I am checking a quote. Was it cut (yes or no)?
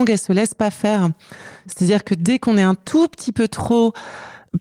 no